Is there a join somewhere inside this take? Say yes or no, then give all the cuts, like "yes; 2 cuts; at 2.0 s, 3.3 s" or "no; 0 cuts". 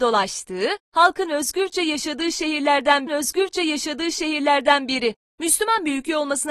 yes; 1 cut; at 3.1 s